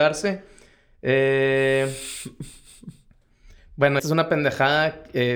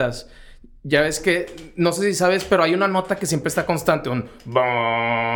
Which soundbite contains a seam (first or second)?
first